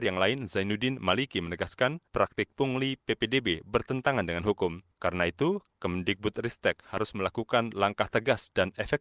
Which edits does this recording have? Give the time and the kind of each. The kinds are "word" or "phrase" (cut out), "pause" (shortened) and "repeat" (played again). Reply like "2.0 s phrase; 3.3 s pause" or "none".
2.1 s pause; 4.9 s pause

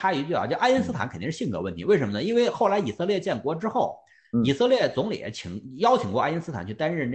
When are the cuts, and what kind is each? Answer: none

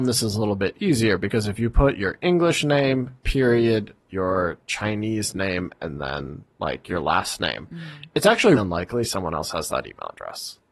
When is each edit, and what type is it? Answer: 8.6 s word

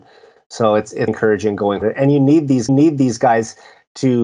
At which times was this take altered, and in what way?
1.1 s word; 1.8 s word; 2.7 s repeat

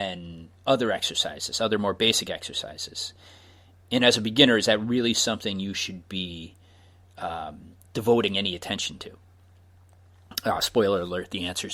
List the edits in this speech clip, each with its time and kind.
none

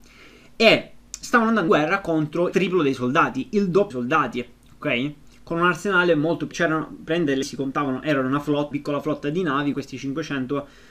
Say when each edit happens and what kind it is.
1.1 s pause; 1.7 s word; 2.5 s word; 3.9 s word; 6.5 s word; 7.4 s word; 8.7 s word; 9.7 s word

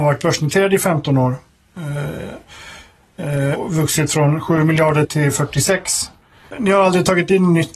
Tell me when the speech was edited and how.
3.6 s word; 5.0 s word

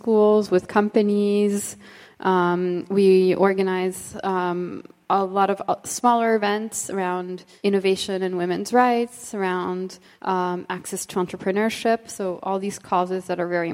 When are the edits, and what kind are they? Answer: none

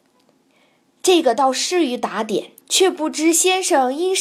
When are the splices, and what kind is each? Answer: 2.6 s pause

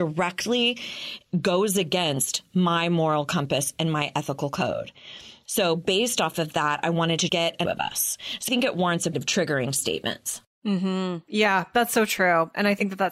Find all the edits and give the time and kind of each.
7.3 s word; 7.6 s phrase; 8.5 s word; 9.1 s phrase

